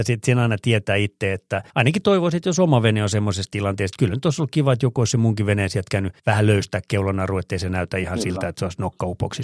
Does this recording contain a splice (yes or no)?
yes